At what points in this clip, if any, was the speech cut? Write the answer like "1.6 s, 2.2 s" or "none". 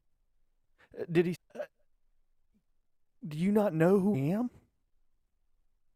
1.3 s, 4.1 s

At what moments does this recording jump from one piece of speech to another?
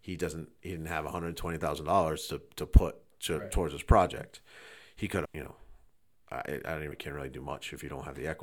5.3 s, 6.9 s

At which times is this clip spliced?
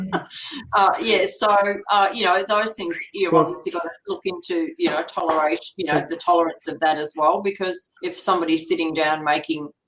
8.0 s

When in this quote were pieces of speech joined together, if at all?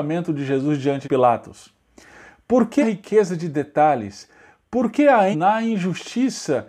1.0 s, 2.8 s, 5.3 s

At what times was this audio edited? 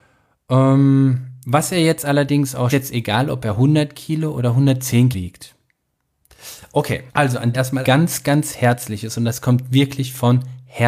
2.7 s, 5.1 s, 7.1 s, 7.5 s, 7.8 s

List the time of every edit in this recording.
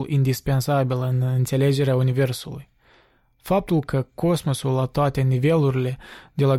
none

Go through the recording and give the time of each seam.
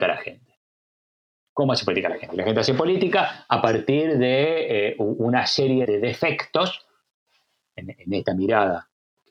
5.8 s

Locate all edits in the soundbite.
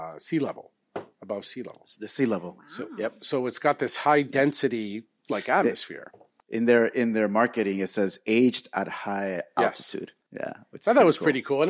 none

